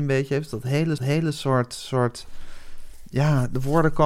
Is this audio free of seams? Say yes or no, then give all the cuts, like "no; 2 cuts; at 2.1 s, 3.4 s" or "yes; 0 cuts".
no; 1 cut; at 1.0 s